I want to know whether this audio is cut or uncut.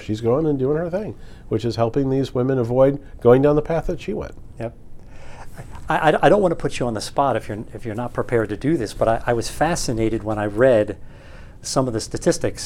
uncut